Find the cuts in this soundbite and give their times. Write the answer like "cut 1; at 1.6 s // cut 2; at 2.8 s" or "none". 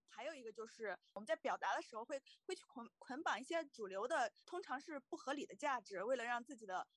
cut 1; at 4.4 s